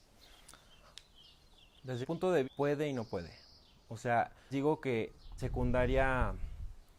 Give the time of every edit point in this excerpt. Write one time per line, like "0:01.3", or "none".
0:02.0
0:02.4
0:04.5
0:05.4

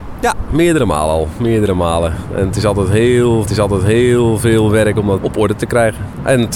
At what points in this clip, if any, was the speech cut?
0:03.5
0:05.2

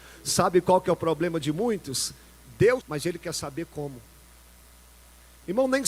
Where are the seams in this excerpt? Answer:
0:02.8

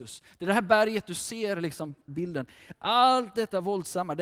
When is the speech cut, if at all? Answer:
0:02.1

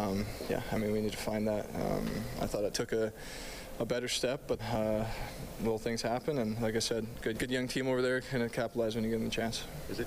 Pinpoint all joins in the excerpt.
0:02.7
0:04.6
0:06.6
0:07.3

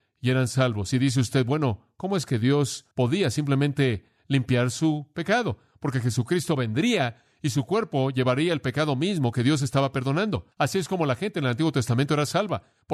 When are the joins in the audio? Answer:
0:02.9
0:10.5

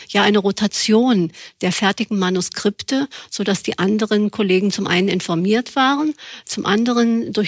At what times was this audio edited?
none

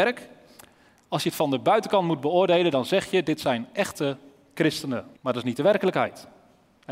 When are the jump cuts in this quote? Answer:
0:05.2

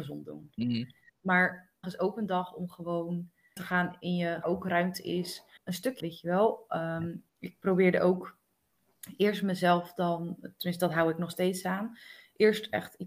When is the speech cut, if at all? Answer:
0:01.8
0:03.6
0:04.4
0:05.6
0:06.0
0:07.3

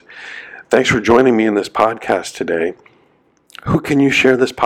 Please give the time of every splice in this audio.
none

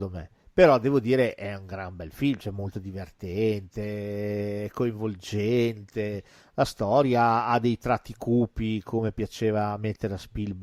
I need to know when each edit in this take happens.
none

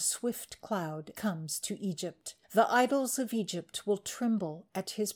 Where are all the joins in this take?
0:01.1
0:02.4

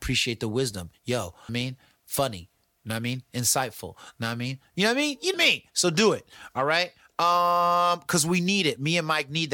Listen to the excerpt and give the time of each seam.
0:01.5
0:05.3

